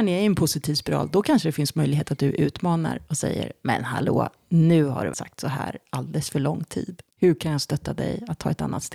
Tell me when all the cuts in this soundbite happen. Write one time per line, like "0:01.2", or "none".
0:05.1
0:07.1